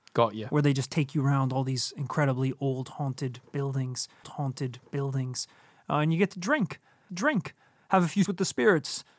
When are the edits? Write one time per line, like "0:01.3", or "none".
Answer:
0:04.2
0:07.1
0:08.3